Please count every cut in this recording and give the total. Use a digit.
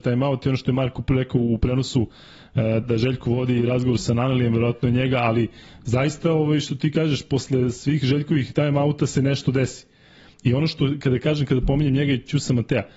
1